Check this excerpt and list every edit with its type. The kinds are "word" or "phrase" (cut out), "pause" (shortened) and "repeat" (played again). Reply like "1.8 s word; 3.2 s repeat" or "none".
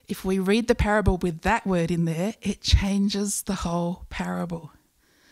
none